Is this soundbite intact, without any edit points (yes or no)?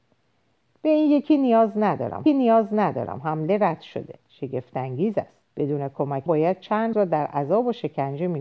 no